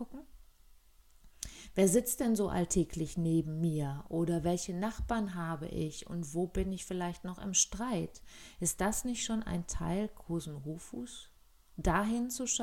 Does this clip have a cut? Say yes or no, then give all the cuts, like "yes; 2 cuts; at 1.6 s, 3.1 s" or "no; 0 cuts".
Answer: no; 0 cuts